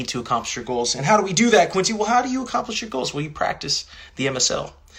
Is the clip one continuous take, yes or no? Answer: yes